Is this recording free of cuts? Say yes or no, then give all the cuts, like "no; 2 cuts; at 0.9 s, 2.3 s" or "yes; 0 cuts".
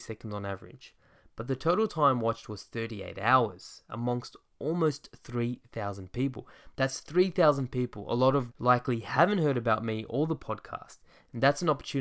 no; 1 cut; at 8.5 s